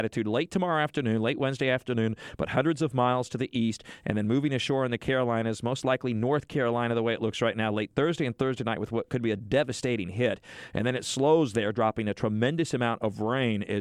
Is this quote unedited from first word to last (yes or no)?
yes